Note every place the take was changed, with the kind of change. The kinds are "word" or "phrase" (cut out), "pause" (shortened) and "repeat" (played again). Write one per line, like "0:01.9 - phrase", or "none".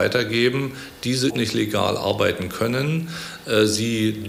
0:01.3 - word